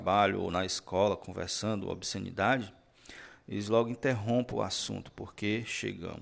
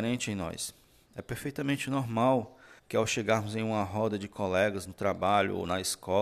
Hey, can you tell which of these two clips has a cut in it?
second; 1 cut; at 2.8 s

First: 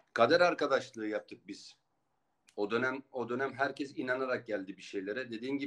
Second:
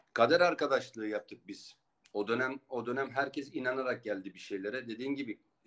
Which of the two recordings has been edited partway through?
second; 1 cut; at 1.9 s

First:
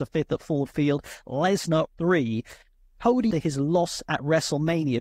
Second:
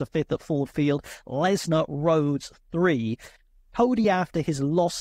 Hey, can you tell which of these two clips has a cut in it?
first; 2 cuts; at 1.9 s, 3.3 s

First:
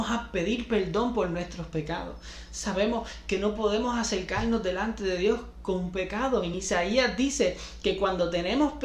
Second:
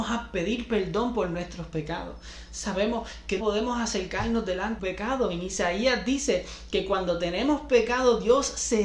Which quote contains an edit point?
second; 2 cuts; at 3.4 s, 4.8 s

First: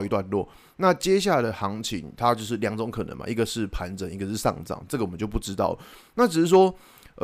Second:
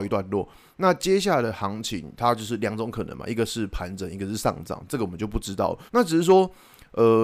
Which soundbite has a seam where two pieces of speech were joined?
second; 1 cut; at 5.9 s

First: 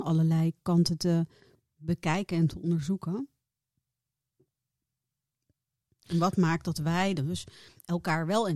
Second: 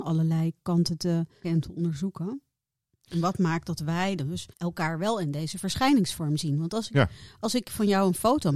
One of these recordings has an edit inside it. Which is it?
second; 3 cuts; at 1.4 s, 2.7 s, 4.5 s

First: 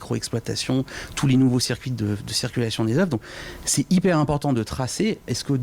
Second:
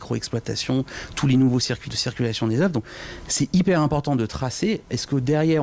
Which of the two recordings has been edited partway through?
second; 1 cut; at 1.8 s

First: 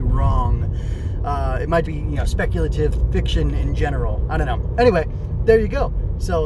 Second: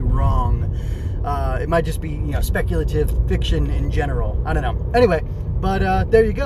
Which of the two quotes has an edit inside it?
first; 2 cuts; at 1.9 s, 5.4 s

